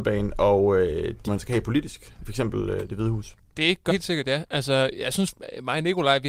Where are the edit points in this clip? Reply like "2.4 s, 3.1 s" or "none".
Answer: 1.3 s, 2.2 s, 3.9 s, 5.3 s